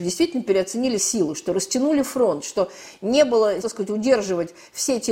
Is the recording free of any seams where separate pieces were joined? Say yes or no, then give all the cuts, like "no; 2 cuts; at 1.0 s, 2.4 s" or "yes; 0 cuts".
no; 2 cuts; at 1.0 s, 3.6 s